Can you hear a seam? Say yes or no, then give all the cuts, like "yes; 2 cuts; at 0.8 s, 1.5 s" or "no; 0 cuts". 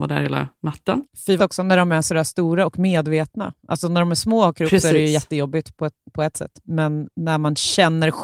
yes; 1 cut; at 1.4 s